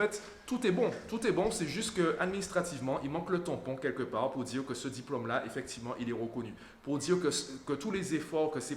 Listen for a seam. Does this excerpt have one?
no; 0 cuts

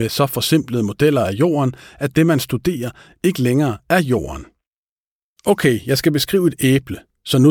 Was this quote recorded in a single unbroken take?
yes; 0 cuts

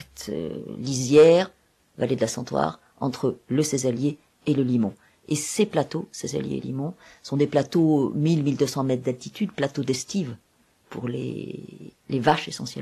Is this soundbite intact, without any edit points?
yes; 0 cuts

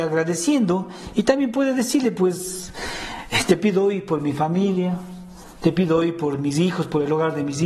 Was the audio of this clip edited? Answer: no; 0 cuts

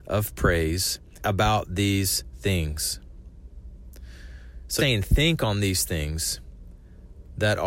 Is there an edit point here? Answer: yes; 2 cuts; at 1.2 s, 4.8 s

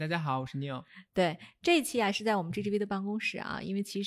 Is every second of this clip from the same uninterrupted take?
yes; 0 cuts

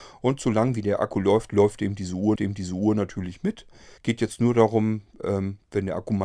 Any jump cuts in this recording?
yes; 2 cuts; at 2.4 s, 4.0 s

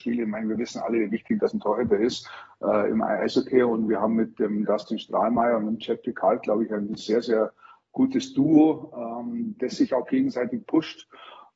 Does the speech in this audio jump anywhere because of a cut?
no; 0 cuts

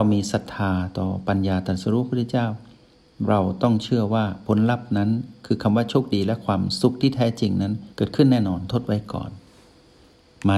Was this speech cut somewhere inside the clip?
yes; 1 cut; at 7.9 s

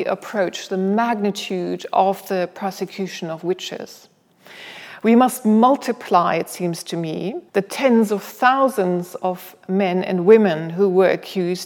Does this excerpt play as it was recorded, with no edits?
no; 1 cut; at 7.5 s

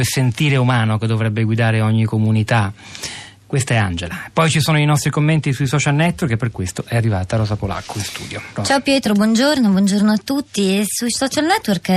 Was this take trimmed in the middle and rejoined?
no; 0 cuts

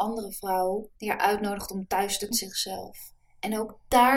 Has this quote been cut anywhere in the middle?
yes; 2 cuts; at 1.0 s, 2.3 s

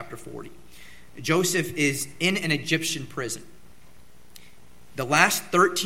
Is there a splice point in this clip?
no; 0 cuts

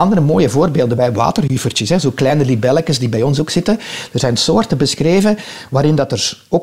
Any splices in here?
no; 0 cuts

